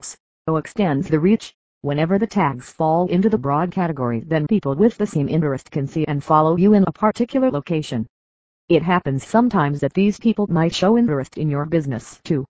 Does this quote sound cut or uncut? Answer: uncut